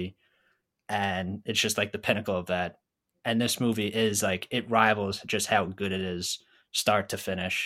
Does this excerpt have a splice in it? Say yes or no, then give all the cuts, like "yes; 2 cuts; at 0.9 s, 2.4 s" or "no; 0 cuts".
no; 0 cuts